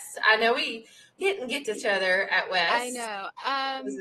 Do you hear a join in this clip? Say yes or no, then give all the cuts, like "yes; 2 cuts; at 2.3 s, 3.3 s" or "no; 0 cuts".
yes; 2 cuts; at 1.2 s, 1.7 s